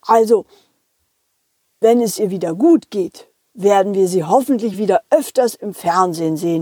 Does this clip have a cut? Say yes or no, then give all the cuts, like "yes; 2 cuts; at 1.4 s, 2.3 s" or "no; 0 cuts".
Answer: no; 0 cuts